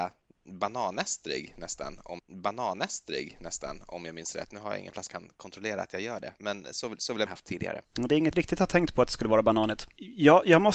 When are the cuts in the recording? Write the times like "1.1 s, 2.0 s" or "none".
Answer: 2.2 s, 5.1 s, 7.3 s, 8.3 s